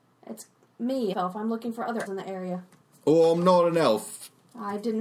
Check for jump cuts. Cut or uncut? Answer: cut